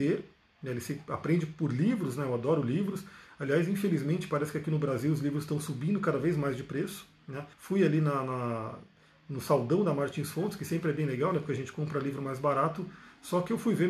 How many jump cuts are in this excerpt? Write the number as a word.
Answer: one